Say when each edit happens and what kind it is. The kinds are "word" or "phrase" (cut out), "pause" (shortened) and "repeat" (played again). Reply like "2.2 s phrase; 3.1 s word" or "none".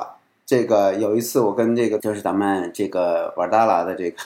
2.0 s word